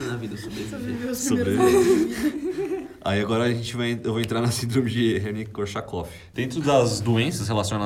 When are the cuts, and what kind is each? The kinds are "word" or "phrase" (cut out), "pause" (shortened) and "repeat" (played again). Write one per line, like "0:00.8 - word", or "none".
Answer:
0:06.3 - pause